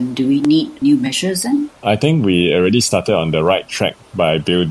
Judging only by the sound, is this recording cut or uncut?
uncut